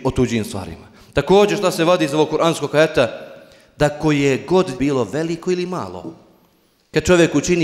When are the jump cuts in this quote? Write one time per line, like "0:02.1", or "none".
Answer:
0:04.8